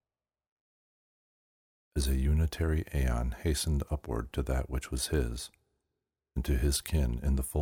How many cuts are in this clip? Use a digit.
0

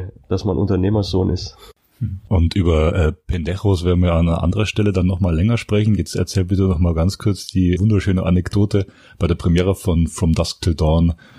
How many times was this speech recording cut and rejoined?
1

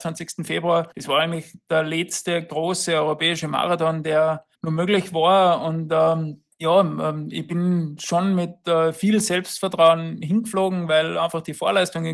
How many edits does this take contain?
3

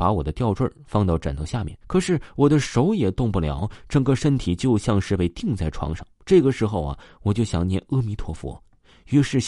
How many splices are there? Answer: 2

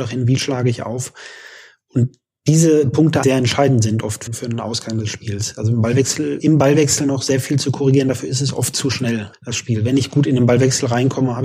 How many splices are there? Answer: 4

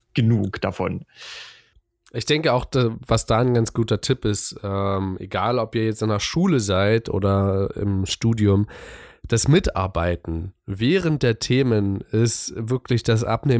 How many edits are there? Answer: 0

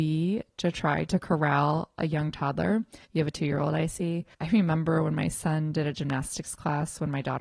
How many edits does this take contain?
2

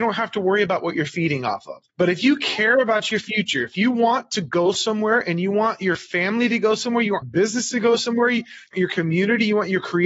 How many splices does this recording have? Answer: 3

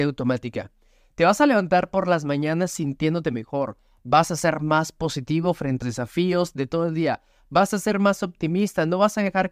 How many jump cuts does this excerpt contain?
1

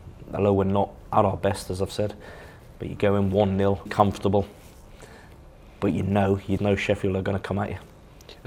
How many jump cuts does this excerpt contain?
2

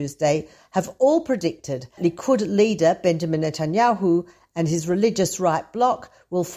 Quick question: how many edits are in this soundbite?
1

